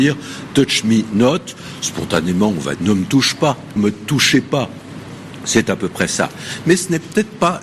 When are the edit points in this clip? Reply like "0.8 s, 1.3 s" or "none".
2.8 s, 3.8 s